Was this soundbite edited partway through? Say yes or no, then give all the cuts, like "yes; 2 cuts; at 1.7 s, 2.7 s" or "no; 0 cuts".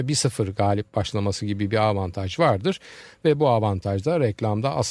no; 0 cuts